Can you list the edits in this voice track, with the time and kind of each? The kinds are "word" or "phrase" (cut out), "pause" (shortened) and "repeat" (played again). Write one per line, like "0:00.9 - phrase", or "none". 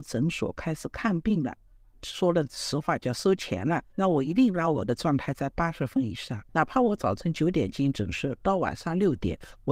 0:03.9 - pause